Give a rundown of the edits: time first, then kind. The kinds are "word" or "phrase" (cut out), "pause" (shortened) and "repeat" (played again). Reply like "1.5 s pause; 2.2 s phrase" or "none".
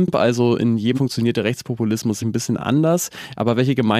0.9 s word; 2.2 s word